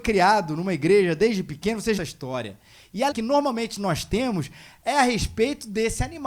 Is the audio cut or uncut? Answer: cut